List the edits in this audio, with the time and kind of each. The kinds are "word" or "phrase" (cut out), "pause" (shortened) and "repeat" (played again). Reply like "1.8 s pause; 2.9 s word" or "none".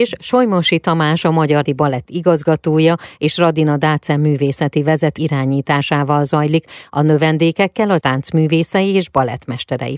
1.7 s word; 5.2 s word; 8.0 s word